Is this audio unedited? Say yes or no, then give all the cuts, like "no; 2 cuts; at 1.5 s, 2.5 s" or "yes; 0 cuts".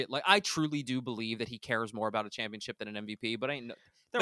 yes; 0 cuts